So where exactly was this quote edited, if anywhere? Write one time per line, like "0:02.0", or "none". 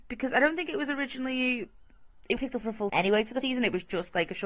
0:02.4
0:02.9
0:03.4